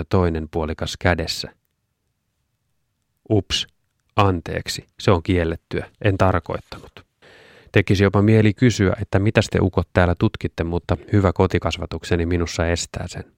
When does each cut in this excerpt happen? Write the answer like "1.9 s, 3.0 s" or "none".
4.9 s, 6.0 s, 7.2 s